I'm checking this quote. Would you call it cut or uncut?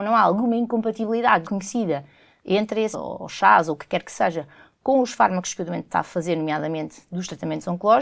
cut